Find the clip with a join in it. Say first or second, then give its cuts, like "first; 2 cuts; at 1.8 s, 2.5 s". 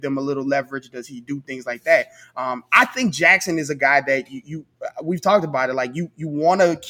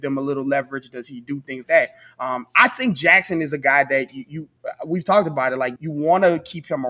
second; 2 cuts; at 1.6 s, 5.8 s